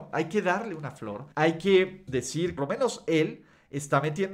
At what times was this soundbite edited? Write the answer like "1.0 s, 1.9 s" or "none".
1.3 s, 2.1 s, 2.6 s

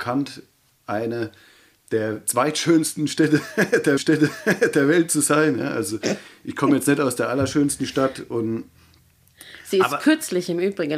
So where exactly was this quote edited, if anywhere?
4.0 s

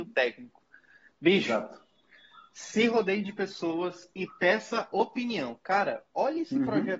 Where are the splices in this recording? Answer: none

